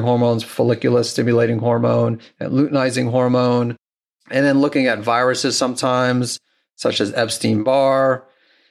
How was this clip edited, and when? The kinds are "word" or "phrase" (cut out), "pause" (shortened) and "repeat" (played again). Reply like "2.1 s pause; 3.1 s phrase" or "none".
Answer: none